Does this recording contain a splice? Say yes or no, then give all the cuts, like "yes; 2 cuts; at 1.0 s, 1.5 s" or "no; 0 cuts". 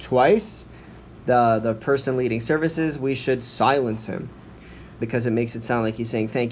yes; 1 cut; at 5.0 s